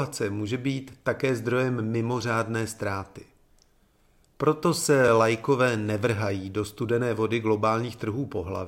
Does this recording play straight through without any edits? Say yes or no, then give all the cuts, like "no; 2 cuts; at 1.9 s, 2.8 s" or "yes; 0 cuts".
yes; 0 cuts